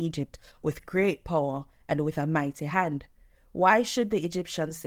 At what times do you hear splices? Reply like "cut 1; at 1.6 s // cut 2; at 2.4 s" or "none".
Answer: none